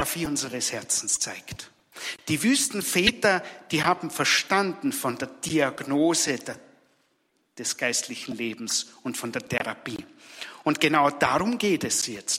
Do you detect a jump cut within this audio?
no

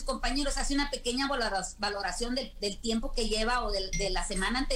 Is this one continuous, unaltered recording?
yes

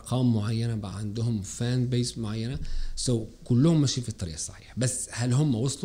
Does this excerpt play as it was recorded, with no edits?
yes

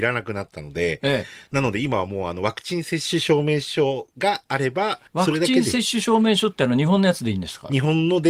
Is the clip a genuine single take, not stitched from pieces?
no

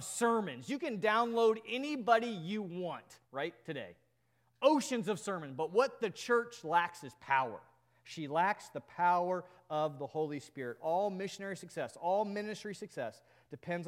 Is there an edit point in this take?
yes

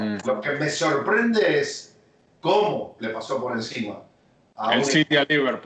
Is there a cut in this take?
yes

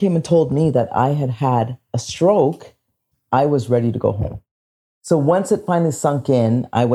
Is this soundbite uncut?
yes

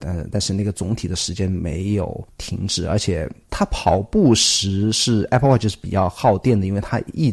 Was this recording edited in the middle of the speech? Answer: no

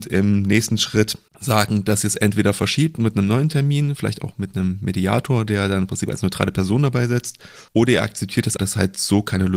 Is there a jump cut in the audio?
yes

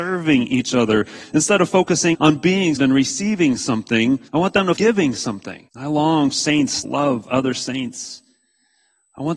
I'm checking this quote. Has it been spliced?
yes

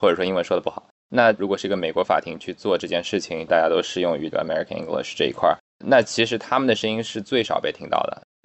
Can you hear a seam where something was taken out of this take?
no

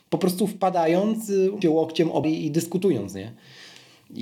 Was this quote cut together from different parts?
yes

